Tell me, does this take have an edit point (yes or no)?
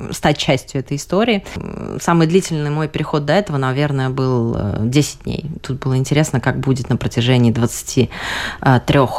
no